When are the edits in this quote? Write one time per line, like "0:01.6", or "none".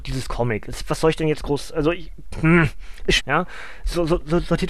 0:03.2